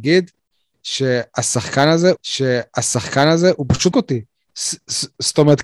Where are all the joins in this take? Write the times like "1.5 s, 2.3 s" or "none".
2.2 s, 3.9 s